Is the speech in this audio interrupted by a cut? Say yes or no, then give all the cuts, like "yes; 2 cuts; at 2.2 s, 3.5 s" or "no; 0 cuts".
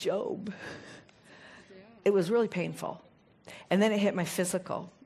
no; 0 cuts